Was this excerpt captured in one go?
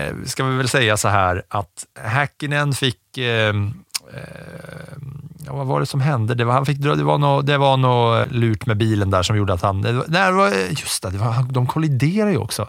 no; 2 cuts; at 1.9 s, 8.2 s

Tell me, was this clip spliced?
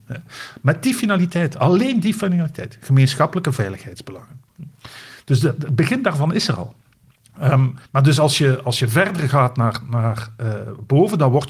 yes; 1 cut; at 7.9 s

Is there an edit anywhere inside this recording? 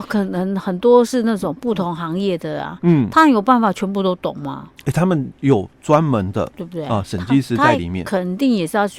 no; 0 cuts

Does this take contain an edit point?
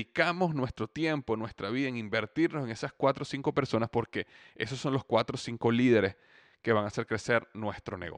no; 0 cuts

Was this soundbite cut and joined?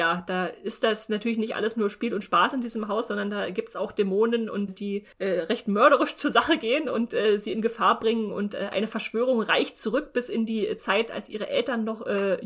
yes; 2 cuts; at 4.7 s, 5.1 s

